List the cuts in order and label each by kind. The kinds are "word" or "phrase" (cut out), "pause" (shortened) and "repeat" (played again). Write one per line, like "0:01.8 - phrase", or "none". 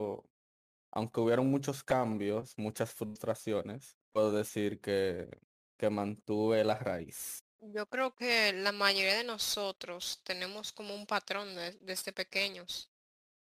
0:04.0 - pause
0:07.5 - pause